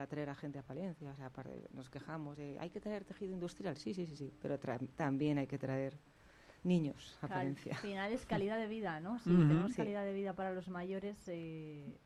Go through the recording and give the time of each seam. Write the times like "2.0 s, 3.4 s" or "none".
6.6 s